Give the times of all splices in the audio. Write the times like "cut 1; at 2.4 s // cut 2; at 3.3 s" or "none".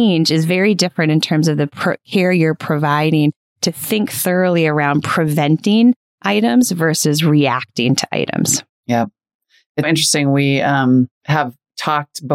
cut 1; at 9.8 s // cut 2; at 11.2 s